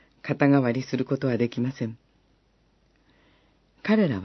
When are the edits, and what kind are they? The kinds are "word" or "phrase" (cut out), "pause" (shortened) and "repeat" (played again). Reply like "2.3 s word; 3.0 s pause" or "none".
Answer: none